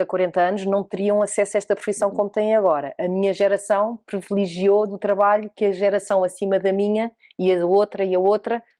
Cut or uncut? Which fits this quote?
uncut